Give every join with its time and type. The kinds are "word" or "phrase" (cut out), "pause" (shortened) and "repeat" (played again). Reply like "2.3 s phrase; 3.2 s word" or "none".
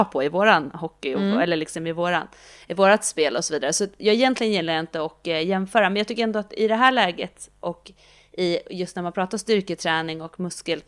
none